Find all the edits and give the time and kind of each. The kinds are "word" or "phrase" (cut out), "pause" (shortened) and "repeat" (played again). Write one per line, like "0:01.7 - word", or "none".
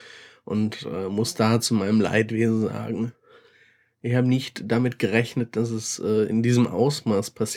none

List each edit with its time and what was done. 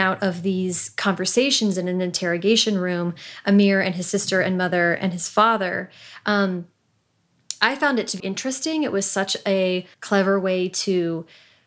0:08.2 - word
0:09.9 - pause

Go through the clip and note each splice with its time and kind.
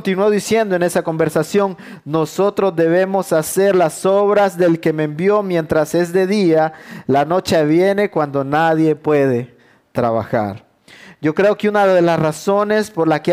none

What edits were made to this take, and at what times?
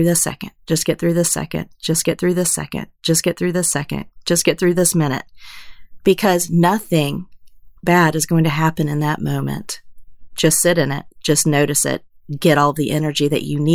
0:07.8 - pause

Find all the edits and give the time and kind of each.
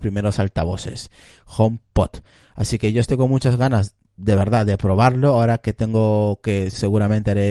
none

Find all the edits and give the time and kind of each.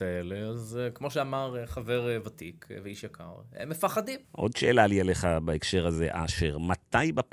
0:04.2 - pause

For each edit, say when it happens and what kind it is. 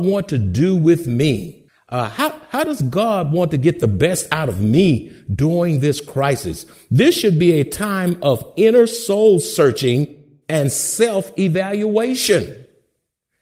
0:01.7 - pause

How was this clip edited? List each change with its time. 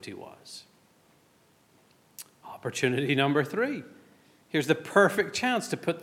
none

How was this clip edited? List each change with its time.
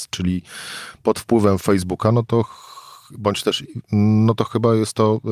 0:03.8 - phrase

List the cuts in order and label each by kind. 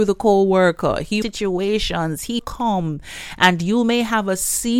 0:01.2 - phrase
0:02.4 - word

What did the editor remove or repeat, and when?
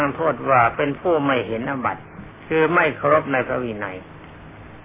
none

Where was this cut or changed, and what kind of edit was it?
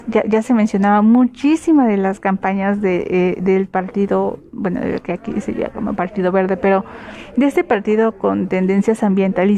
none

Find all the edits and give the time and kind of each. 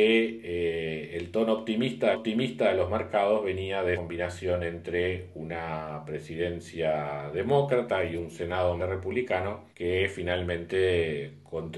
0:02.1 - repeat
0:03.9 - word
0:08.8 - word
0:09.7 - pause

